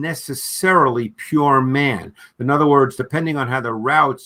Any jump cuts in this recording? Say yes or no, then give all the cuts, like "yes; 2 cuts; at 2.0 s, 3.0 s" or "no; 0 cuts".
no; 0 cuts